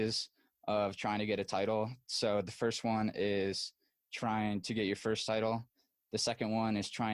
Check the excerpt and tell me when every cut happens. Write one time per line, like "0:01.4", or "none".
none